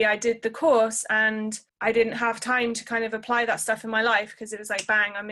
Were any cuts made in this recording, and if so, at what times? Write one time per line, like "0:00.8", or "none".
0:01.7